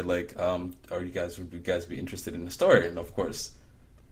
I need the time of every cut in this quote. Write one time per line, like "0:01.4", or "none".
none